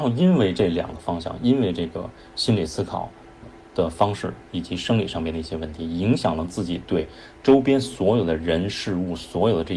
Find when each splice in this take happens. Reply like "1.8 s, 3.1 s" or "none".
3.4 s